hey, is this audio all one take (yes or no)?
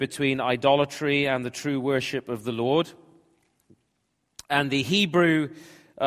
yes